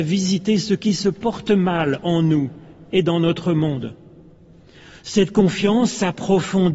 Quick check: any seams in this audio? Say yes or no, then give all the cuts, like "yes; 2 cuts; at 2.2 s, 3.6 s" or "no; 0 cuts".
no; 0 cuts